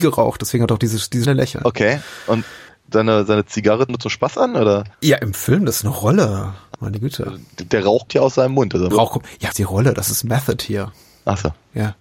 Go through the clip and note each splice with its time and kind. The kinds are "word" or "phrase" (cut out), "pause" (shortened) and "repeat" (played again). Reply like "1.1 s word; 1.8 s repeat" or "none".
1.2 s word; 2.7 s pause; 3.9 s phrase; 4.9 s pause; 8.1 s word; 8.9 s phrase; 9.5 s phrase